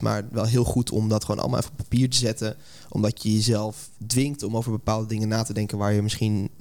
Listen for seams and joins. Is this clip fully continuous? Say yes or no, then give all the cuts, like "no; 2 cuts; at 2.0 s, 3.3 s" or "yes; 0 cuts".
yes; 0 cuts